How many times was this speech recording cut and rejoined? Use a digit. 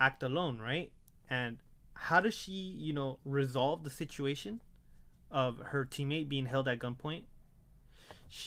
0